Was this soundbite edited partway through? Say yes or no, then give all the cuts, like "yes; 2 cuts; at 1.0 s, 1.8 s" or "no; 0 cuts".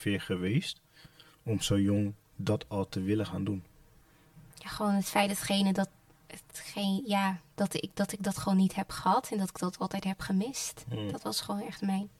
yes; 1 cut; at 4.5 s